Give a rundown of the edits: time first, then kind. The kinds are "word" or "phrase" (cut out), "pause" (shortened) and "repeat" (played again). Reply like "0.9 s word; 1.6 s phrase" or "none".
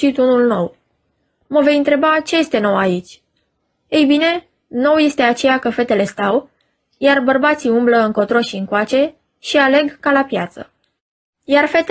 none

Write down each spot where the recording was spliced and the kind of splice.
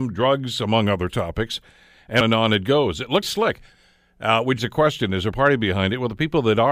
2.2 s word; 3.2 s word; 4.6 s word; 5.3 s word

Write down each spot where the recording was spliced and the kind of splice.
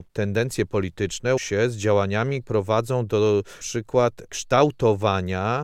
1.4 s word; 2.4 s word; 3.6 s word

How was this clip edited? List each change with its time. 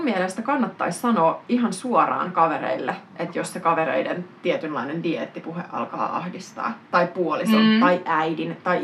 none

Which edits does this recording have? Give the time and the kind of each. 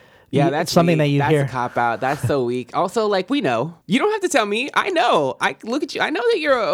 3.8 s pause

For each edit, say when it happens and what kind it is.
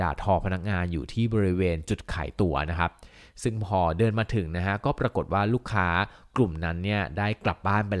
none

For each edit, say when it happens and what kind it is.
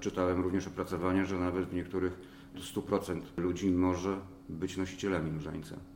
2.5 s word

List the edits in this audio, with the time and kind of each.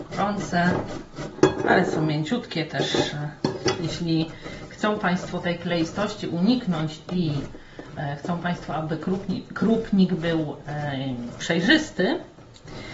none

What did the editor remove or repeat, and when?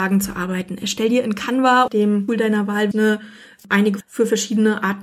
1.9 s word; 2.3 s word; 2.9 s word; 4.0 s word

